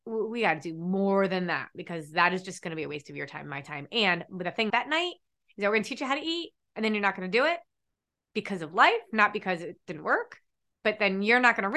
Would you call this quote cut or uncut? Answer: cut